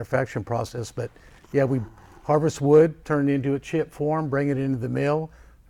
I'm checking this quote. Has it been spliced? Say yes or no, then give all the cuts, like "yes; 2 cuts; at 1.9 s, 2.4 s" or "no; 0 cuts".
no; 0 cuts